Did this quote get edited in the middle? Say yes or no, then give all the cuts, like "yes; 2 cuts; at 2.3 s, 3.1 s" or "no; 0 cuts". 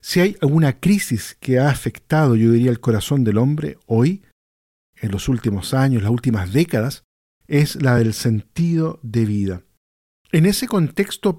no; 0 cuts